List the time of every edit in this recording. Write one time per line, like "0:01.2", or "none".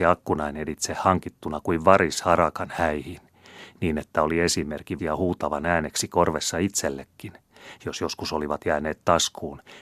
0:05.0
0:08.6